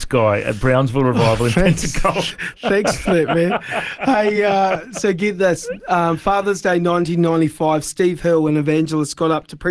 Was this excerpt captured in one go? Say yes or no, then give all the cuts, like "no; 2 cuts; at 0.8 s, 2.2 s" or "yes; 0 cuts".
yes; 0 cuts